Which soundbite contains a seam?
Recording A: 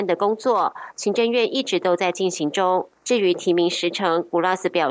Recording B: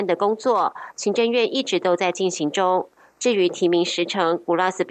A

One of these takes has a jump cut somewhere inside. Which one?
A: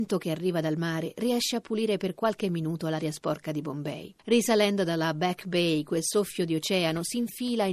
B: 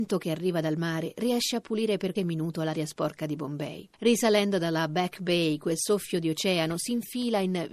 B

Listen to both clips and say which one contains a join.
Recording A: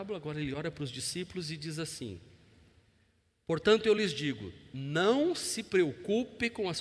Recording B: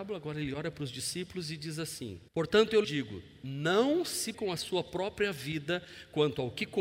B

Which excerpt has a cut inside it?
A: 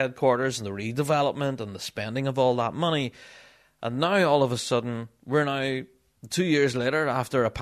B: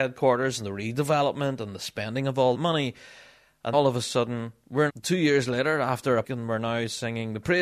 B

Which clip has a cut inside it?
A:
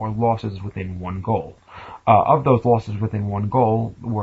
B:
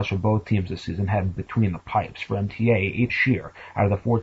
B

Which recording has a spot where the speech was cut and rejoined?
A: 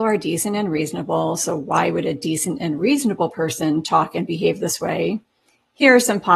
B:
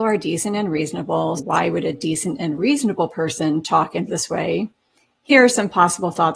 B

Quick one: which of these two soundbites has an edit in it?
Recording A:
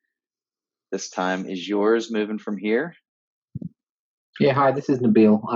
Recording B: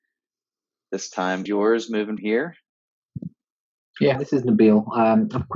B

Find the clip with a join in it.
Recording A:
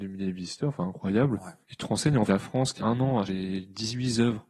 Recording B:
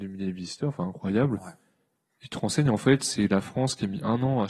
A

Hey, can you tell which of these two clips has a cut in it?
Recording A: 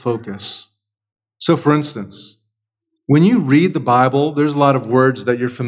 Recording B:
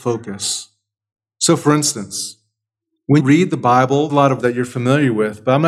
B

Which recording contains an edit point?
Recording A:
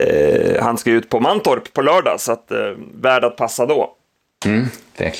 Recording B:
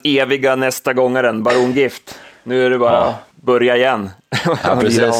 B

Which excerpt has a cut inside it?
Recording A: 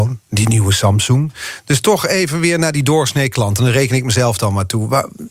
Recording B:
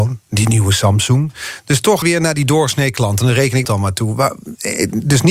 B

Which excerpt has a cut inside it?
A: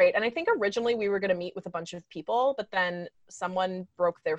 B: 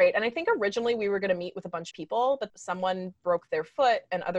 B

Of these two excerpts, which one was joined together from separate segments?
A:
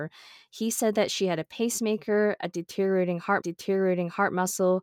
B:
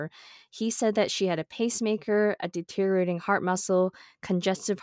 A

